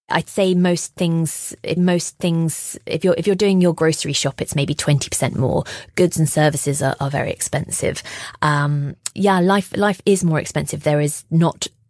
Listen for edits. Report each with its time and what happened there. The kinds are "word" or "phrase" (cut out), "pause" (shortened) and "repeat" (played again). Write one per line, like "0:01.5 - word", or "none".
0:01.8 - repeat
0:09.1 - word